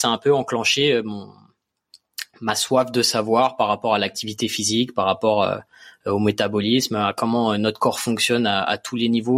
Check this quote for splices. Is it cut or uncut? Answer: uncut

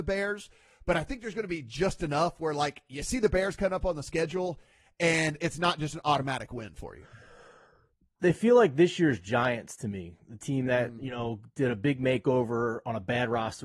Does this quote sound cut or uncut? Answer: uncut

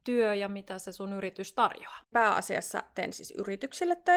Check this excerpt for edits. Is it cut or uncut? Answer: cut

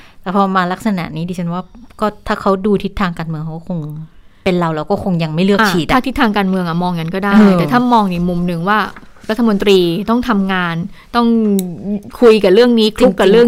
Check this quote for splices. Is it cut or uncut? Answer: uncut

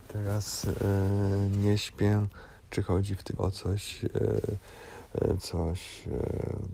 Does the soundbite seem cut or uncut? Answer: cut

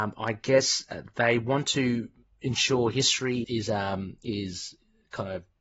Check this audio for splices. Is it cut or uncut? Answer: cut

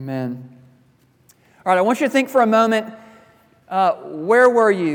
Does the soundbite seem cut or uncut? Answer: uncut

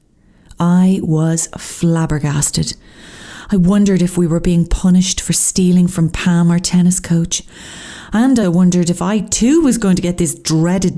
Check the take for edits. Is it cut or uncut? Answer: cut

